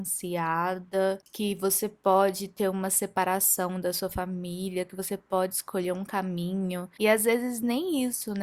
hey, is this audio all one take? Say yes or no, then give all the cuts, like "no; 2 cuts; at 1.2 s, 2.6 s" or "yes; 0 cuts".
yes; 0 cuts